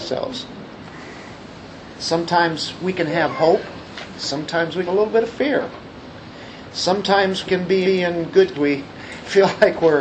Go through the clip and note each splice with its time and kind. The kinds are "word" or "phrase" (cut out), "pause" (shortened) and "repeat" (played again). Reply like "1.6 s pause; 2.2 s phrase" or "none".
4.9 s phrase; 7.4 s word; 7.8 s repeat; 8.5 s phrase